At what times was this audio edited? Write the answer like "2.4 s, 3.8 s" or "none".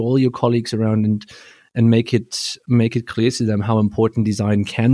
none